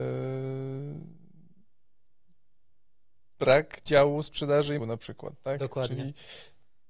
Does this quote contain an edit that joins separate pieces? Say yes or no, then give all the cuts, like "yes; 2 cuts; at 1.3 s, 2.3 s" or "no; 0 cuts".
yes; 1 cut; at 4.8 s